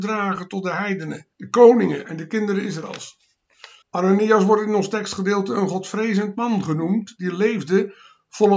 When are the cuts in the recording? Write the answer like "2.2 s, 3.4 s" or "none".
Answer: 1.3 s, 3.8 s